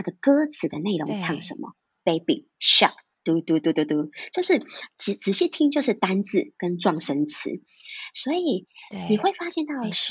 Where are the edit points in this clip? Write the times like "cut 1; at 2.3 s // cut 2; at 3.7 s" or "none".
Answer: none